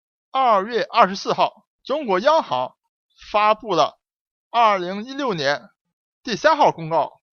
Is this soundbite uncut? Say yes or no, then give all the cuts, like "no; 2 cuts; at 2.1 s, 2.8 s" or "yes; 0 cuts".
no; 1 cut; at 1.7 s